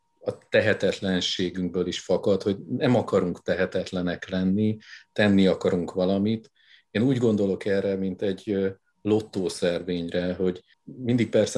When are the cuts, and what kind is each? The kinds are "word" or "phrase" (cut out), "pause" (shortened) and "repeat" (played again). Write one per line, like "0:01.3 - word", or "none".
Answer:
none

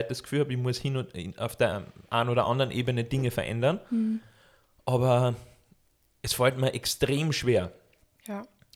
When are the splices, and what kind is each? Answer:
none

